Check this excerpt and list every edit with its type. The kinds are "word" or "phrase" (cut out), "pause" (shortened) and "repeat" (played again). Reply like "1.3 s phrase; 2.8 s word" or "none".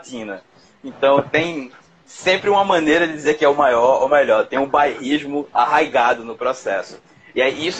none